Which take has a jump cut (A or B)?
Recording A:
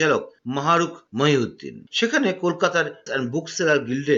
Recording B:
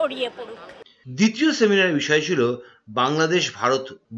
A